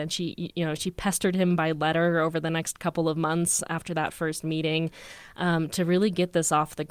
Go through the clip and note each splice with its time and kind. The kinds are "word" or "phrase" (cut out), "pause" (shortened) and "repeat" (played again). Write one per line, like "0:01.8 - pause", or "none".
none